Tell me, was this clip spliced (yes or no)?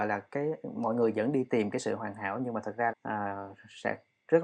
yes